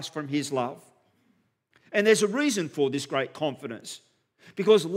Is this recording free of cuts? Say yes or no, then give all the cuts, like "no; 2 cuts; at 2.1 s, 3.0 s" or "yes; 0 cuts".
yes; 0 cuts